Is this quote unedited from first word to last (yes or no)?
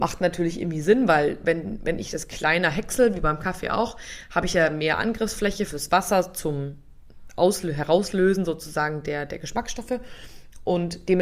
yes